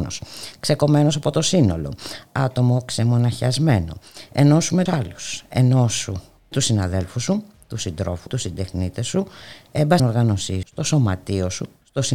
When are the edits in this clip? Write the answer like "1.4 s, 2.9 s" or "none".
4.9 s, 6.5 s, 8.3 s, 10.0 s, 10.6 s